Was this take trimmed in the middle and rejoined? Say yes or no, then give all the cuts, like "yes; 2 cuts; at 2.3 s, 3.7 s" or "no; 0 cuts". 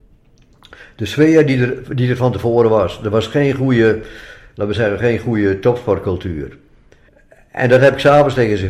yes; 1 cut; at 7.1 s